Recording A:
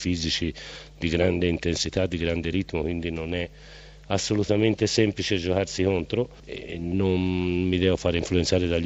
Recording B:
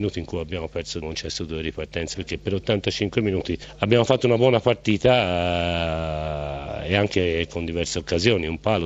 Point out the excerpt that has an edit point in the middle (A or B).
B